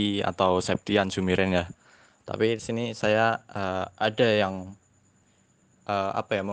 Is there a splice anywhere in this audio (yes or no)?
no